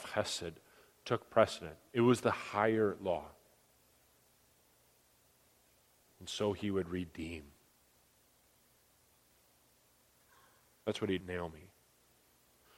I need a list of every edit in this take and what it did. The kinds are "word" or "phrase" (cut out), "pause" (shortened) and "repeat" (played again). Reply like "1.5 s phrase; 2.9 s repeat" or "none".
11.2 s phrase